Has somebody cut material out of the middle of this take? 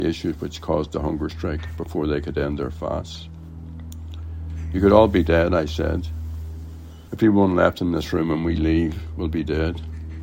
yes; 1 cut; at 7.1 s

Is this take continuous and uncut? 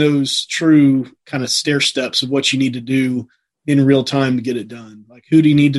yes; 0 cuts

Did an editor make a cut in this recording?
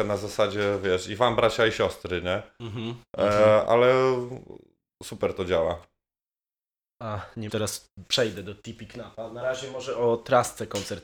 yes; 2 cuts; at 3.7 s, 7.5 s

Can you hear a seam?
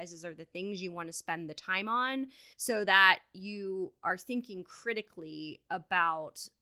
yes; 1 cut; at 2.5 s

